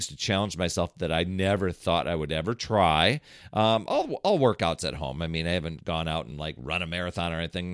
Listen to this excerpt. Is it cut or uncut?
uncut